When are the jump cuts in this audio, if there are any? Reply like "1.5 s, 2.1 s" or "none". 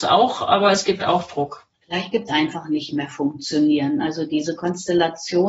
1.0 s, 1.8 s, 2.3 s